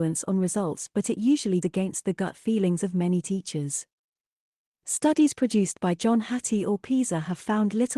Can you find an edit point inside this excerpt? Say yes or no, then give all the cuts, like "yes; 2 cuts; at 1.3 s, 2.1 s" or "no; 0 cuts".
yes; 1 cut; at 1.6 s